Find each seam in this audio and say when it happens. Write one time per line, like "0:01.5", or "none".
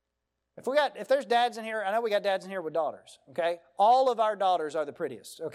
none